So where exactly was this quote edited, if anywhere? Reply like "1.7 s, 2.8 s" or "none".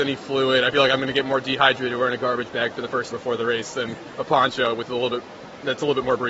3.1 s